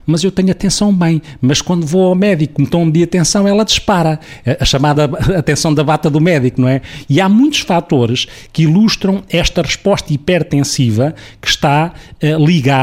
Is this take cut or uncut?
cut